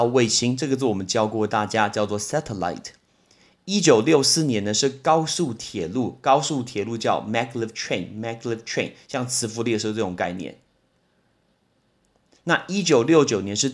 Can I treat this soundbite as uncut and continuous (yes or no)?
yes